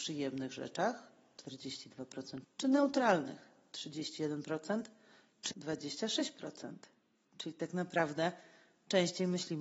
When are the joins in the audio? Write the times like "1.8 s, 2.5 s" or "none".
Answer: 1.4 s, 2.4 s, 5.5 s